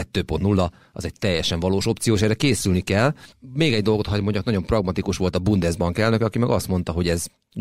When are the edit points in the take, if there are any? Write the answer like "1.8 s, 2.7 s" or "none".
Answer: none